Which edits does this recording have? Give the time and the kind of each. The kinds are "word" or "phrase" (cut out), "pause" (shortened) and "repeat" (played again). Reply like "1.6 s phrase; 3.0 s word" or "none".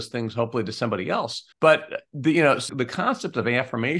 1.5 s pause; 2.7 s word